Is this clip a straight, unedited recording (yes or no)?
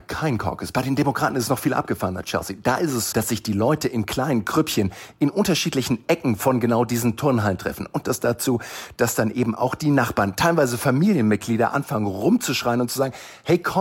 no